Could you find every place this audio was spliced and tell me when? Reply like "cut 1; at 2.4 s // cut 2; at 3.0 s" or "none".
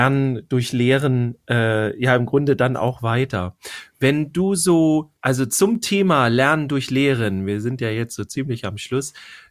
cut 1; at 5.2 s